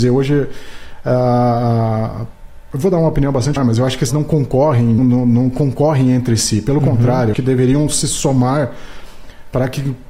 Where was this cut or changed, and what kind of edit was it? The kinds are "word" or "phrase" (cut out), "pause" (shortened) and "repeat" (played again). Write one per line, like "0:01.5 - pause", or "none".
0:03.6 - word
0:04.1 - word
0:05.0 - word
0:07.3 - word